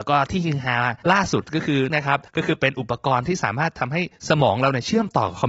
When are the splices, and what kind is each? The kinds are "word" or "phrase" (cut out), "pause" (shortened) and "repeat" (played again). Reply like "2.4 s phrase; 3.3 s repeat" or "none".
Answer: 1.0 s pause; 1.9 s word; 2.3 s pause